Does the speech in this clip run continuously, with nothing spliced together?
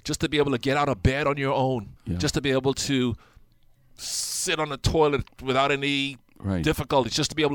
no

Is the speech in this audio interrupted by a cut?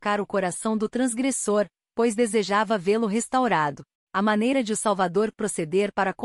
no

